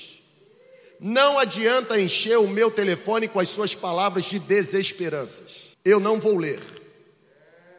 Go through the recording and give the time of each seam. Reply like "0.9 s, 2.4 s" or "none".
5.7 s